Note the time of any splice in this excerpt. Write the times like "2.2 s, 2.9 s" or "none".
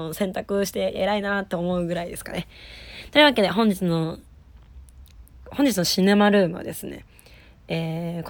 none